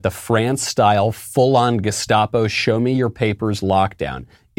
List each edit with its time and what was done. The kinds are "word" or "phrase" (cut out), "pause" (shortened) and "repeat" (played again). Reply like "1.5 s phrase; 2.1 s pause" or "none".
none